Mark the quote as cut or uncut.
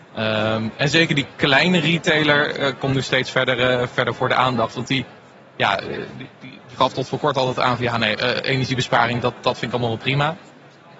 uncut